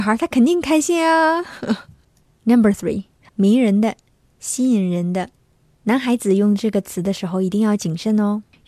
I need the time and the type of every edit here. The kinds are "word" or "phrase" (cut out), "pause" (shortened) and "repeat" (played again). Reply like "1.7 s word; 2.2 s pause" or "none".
3.3 s word